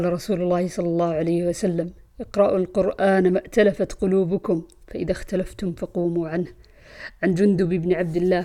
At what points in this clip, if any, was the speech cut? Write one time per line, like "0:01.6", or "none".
none

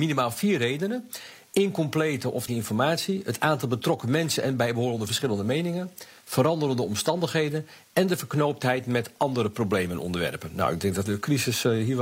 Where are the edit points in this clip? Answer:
0:02.5
0:11.1

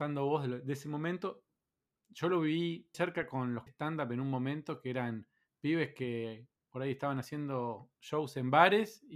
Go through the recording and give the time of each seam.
0:02.9
0:03.7

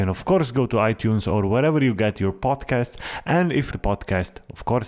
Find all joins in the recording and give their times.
0:03.7

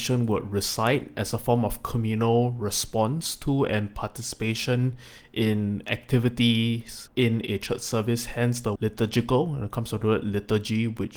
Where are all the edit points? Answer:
0:07.1
0:08.8

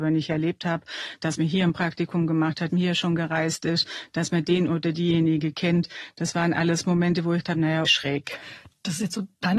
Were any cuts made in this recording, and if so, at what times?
0:02.7
0:07.4
0:07.9

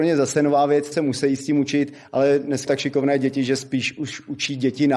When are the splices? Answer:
0:00.9
0:02.7

